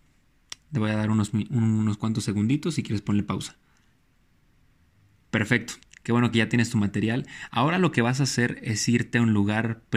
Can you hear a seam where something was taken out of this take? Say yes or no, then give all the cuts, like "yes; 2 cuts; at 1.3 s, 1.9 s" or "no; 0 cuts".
no; 0 cuts